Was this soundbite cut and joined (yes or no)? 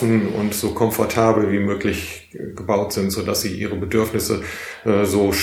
no